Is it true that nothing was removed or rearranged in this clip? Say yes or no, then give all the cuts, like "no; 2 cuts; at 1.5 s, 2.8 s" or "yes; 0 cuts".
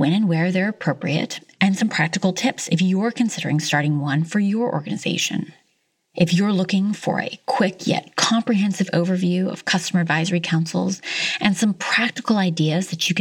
yes; 0 cuts